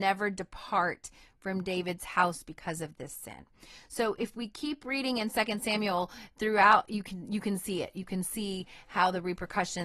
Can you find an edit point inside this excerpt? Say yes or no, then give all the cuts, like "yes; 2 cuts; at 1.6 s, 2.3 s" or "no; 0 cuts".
no; 0 cuts